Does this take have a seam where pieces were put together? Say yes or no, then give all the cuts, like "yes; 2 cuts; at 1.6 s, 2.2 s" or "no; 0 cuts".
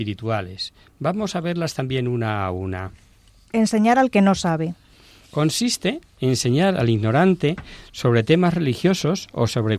no; 0 cuts